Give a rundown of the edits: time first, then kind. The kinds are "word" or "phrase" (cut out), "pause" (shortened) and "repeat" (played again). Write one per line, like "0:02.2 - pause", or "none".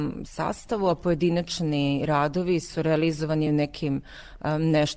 none

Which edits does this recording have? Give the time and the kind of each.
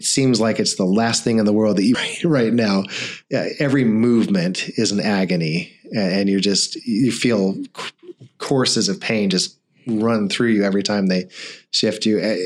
0:01.9 - phrase

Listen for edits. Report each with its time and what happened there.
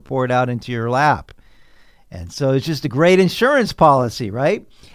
none

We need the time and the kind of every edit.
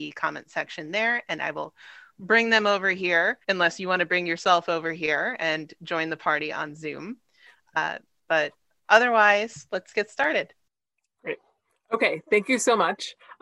0:03.4 - pause

